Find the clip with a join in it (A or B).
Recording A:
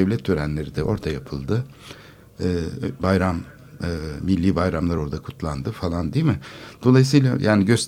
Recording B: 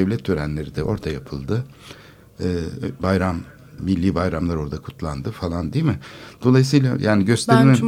B